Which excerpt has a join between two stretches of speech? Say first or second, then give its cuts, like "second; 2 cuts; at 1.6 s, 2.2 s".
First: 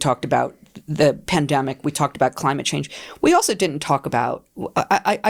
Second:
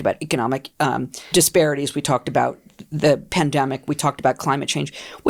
second; 1 cut; at 1.3 s